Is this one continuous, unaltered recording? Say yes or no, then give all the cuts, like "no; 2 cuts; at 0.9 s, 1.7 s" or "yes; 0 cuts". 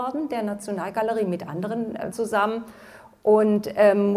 no; 1 cut; at 2.1 s